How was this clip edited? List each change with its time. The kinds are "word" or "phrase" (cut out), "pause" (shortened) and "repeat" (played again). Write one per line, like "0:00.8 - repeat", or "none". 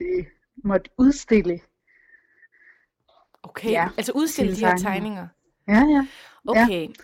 none